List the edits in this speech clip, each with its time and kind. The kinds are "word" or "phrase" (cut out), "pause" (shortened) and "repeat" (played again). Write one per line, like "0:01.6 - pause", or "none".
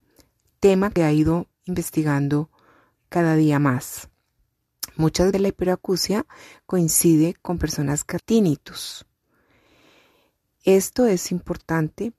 0:01.0 - word
0:05.3 - word
0:08.2 - word